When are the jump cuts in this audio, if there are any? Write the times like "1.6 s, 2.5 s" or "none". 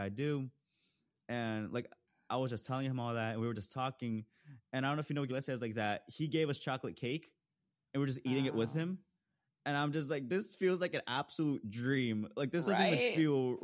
5.3 s